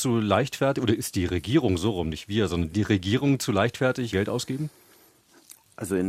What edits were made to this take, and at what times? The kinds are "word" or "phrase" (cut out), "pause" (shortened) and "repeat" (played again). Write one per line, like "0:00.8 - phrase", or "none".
0:04.1 - word